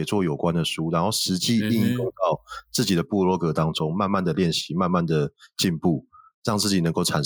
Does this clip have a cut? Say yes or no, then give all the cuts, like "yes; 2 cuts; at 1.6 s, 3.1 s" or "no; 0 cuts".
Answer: no; 0 cuts